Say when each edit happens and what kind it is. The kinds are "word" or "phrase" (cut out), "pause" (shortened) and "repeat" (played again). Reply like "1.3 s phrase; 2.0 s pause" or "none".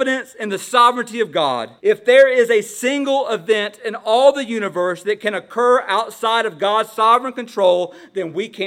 1.8 s pause